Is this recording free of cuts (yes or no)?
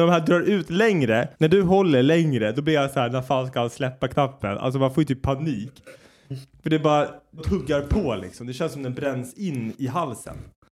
no